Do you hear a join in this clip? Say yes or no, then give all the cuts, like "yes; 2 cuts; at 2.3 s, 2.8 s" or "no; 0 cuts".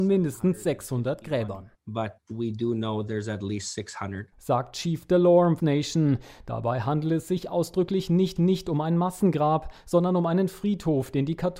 yes; 2 cuts; at 5.6 s, 8.4 s